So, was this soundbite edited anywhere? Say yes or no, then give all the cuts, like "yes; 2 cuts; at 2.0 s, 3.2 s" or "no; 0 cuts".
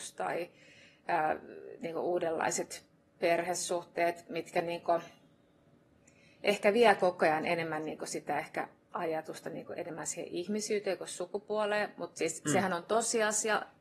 no; 0 cuts